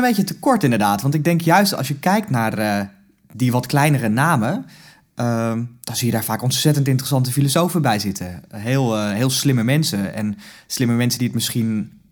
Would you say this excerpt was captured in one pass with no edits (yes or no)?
yes